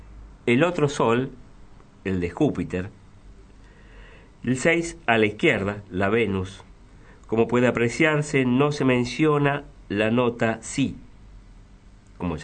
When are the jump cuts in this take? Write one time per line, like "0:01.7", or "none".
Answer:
none